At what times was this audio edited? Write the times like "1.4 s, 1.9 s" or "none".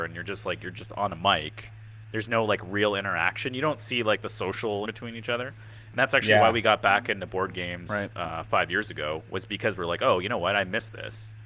4.8 s

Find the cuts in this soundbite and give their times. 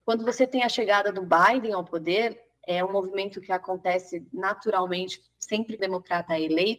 5.8 s

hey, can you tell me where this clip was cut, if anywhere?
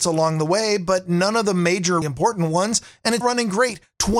2.0 s, 3.2 s

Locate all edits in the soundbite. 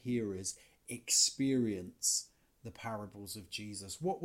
none

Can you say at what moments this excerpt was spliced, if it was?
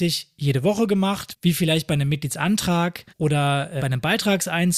3.1 s, 3.8 s

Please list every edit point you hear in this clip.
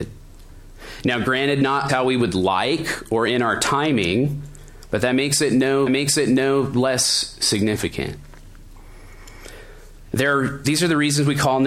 1.9 s, 5.9 s, 10.6 s

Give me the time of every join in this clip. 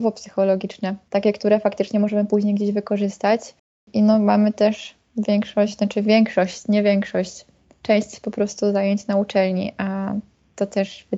none

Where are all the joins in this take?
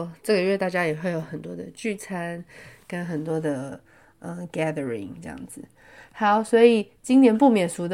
none

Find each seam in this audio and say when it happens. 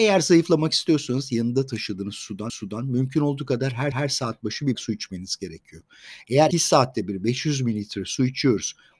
2.5 s, 3.9 s, 4.7 s, 6.5 s

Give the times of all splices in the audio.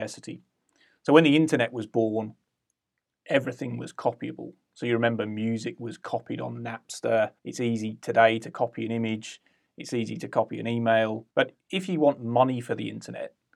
7.4 s, 11.3 s

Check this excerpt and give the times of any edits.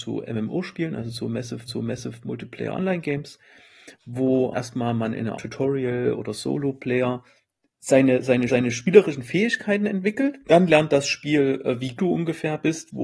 1.7 s, 4.5 s, 5.3 s, 7.4 s, 8.5 s, 10.4 s, 12.0 s

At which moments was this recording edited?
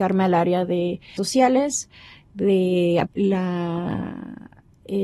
1.2 s, 3.1 s

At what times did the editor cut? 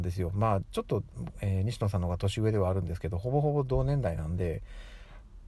none

